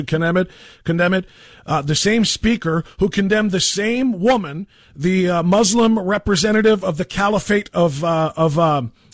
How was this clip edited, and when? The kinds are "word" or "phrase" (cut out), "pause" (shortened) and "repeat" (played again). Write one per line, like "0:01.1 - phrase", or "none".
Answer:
none